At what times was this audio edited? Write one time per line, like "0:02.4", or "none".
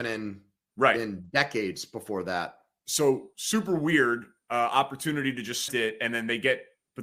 0:05.7